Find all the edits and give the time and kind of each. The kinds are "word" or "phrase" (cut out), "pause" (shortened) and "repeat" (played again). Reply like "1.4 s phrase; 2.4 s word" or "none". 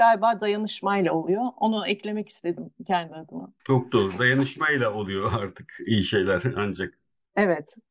3.6 s pause